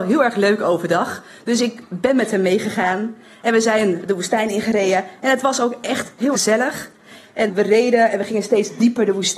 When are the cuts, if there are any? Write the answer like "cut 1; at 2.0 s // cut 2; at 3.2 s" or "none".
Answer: cut 1; at 6.3 s // cut 2; at 7.5 s